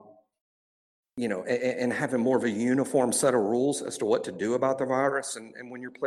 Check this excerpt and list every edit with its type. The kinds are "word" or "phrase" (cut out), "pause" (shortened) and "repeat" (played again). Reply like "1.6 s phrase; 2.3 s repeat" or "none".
none